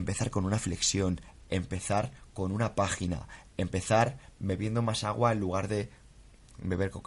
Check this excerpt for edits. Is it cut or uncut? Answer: uncut